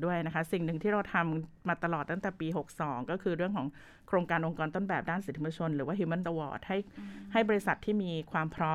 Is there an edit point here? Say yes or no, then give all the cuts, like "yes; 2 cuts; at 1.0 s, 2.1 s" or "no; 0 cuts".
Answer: yes; 1 cut; at 6.2 s